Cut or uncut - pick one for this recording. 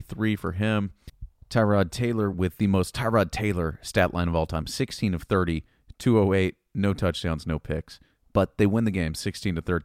uncut